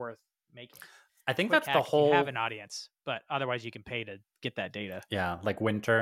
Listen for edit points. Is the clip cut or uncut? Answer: uncut